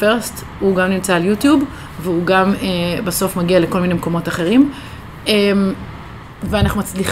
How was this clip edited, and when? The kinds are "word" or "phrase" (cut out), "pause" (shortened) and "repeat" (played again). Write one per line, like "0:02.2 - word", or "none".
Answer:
none